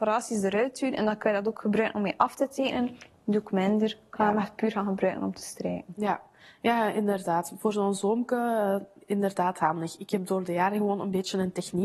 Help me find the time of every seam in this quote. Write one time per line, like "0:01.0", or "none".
none